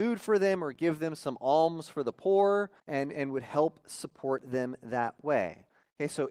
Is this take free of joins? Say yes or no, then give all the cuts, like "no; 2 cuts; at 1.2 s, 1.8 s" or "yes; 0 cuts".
no; 1 cut; at 2.8 s